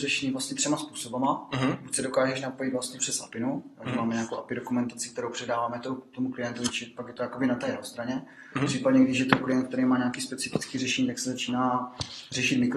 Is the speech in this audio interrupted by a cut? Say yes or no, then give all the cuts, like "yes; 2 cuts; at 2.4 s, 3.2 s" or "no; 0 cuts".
no; 0 cuts